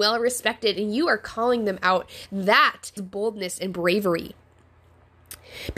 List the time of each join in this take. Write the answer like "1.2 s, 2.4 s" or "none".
3.0 s